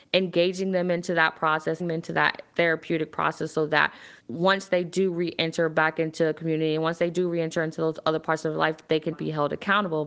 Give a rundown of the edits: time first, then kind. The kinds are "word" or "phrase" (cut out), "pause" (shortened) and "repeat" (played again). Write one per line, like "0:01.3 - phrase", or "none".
0:01.8 - word
0:04.2 - pause
0:09.1 - word

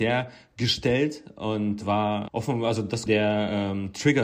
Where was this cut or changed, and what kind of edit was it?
0:01.8 - word
0:02.3 - word
0:03.1 - word

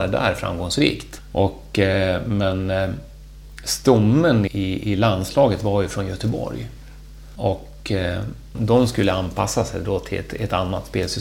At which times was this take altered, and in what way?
0:04.5 - word
0:08.5 - word

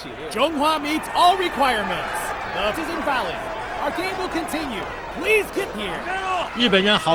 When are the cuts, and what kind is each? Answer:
0:02.7 - word
0:05.7 - phrase

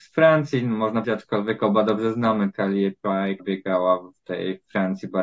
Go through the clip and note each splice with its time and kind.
0:01.0 - word
0:03.4 - word

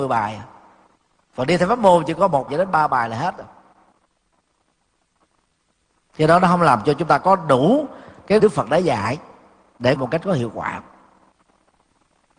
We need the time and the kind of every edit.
0:02.5 - word
0:08.4 - phrase
0:10.0 - phrase

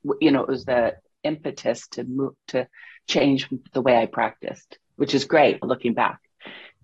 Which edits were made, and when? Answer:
0:05.6 - word

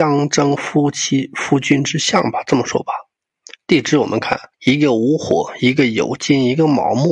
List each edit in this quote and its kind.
0:04.5 - pause

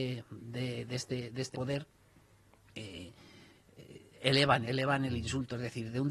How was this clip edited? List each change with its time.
0:01.5 - word
0:04.6 - word

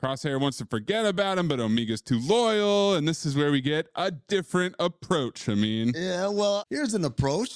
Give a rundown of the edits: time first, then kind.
none

